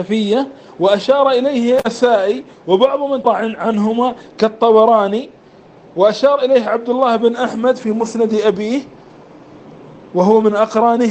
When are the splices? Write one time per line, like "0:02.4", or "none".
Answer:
0:03.2